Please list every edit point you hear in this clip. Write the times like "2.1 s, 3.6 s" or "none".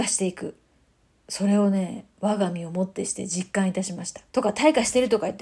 4.3 s